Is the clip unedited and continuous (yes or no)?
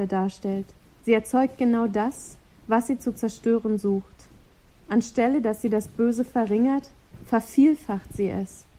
yes